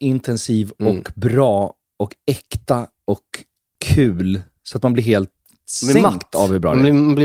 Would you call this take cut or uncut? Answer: uncut